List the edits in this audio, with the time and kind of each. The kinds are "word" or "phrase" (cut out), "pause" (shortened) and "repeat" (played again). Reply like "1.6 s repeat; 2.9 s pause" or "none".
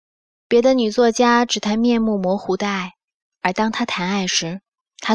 none